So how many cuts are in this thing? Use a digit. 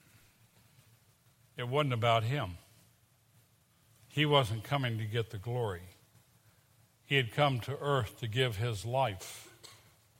0